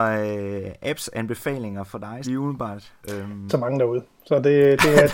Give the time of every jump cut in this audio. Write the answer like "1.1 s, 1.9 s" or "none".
2.2 s, 3.0 s, 3.5 s